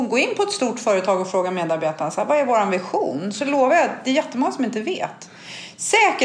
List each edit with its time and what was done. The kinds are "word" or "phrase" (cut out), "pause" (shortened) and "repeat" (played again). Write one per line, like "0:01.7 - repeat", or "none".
none